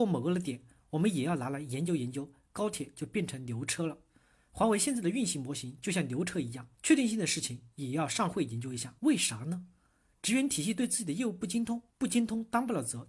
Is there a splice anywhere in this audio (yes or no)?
yes